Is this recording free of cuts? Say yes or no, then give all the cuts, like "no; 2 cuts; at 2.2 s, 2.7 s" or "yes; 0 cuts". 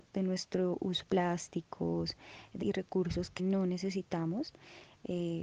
no; 3 cuts; at 1.0 s, 2.6 s, 3.4 s